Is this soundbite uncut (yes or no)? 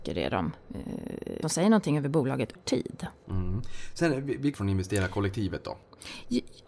no